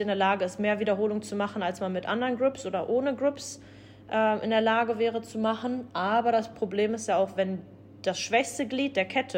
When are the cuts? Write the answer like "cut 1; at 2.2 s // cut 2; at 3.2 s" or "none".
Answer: none